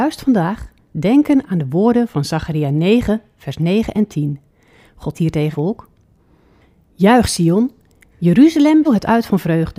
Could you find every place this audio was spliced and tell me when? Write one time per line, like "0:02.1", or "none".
0:05.1
0:05.5
0:08.9